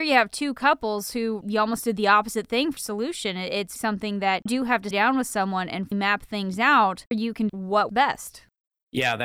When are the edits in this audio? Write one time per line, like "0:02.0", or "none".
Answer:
0:01.4
0:02.8
0:03.8
0:04.5
0:04.9
0:05.9
0:07.1
0:07.5
0:07.9